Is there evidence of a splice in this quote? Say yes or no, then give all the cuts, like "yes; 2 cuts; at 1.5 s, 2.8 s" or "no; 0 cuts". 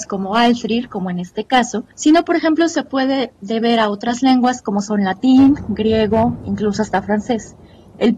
yes; 1 cut; at 1.9 s